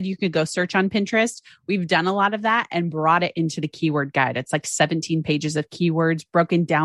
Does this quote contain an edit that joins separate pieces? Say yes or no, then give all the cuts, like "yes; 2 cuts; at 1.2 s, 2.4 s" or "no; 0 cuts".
no; 0 cuts